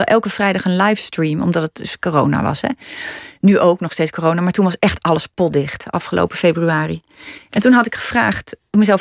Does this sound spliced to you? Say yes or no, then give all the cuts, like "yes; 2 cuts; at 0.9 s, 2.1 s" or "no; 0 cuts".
no; 0 cuts